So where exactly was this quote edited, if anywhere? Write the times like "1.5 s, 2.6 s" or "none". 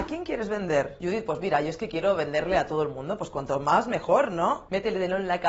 none